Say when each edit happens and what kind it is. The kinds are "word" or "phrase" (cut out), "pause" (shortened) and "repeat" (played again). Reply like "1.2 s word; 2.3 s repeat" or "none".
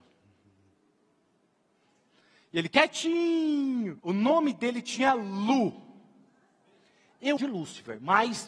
4.0 s pause; 7.4 s phrase